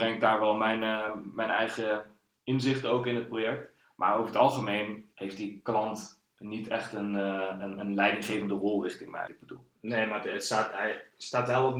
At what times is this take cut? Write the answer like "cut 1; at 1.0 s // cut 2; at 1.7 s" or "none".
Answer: cut 1; at 3.8 s // cut 2; at 9.3 s